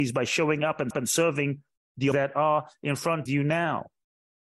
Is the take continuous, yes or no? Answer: no